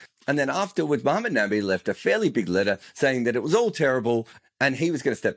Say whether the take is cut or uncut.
uncut